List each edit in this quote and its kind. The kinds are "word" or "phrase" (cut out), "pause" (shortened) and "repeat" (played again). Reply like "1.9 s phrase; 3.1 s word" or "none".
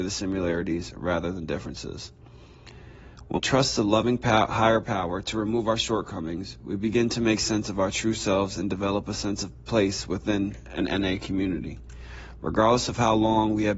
3.4 s word